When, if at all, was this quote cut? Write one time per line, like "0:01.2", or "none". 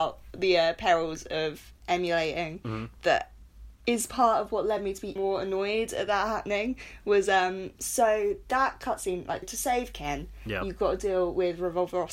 0:05.2
0:09.4